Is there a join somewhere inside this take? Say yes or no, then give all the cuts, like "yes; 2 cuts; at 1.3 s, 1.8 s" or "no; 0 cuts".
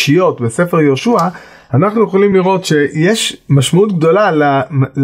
no; 0 cuts